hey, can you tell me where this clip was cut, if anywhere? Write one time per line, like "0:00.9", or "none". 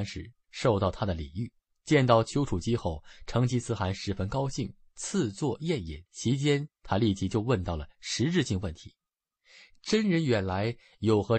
0:06.1